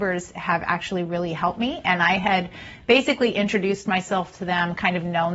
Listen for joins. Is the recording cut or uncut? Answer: uncut